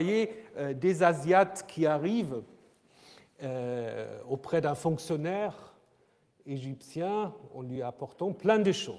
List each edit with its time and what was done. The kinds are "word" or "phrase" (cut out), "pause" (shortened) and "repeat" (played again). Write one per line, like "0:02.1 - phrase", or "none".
none

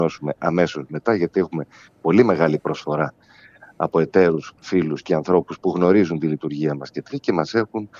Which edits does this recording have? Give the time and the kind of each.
0:07.1 - word

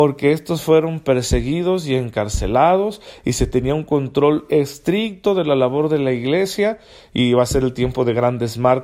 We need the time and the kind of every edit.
none

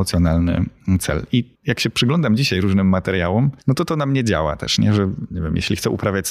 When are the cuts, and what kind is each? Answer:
0:01.5 - pause
0:03.6 - pause

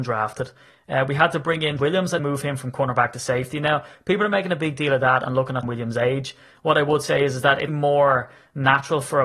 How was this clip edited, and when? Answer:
0:01.8 - word
0:02.2 - word
0:05.6 - word
0:07.7 - word

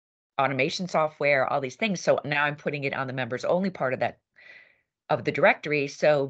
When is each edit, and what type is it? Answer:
none

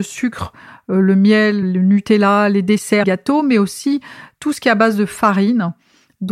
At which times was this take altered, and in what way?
0:01.6 - word
0:03.0 - word

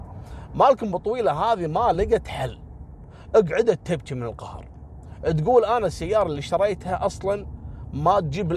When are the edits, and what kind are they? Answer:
none

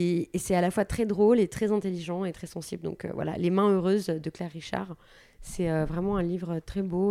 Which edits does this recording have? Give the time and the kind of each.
none

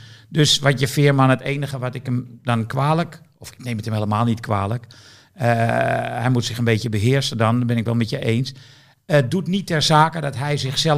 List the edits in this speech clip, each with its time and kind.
none

